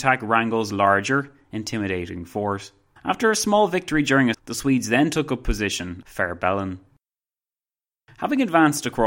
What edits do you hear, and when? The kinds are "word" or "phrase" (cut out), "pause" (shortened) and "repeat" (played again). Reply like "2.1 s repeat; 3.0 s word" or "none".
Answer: 3.0 s pause; 4.3 s word; 6.0 s phrase